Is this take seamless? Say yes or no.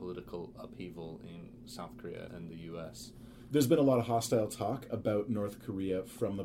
no